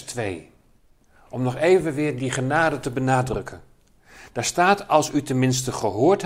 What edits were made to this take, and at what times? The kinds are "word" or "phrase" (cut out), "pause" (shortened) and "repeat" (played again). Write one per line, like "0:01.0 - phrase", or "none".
0:02.2 - word